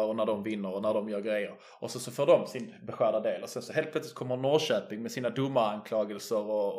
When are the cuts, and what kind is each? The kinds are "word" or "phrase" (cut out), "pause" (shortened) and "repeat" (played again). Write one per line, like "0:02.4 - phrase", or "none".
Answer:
none